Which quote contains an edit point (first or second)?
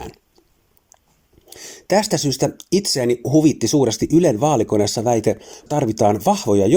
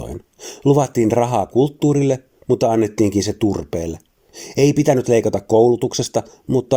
first